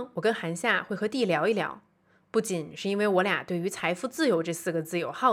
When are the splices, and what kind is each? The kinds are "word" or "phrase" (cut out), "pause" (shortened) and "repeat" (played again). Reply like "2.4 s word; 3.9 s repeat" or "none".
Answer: none